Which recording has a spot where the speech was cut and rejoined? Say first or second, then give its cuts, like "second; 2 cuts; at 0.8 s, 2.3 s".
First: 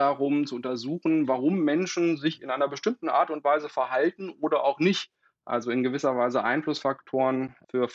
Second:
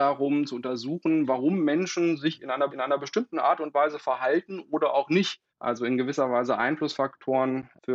second; 2 cuts; at 2.7 s, 5.5 s